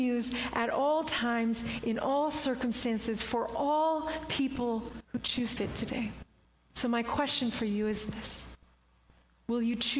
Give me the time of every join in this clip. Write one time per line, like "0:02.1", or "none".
0:05.0
0:05.6
0:06.4